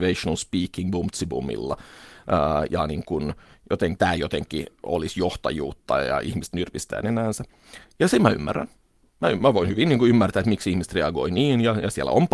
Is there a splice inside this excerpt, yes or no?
yes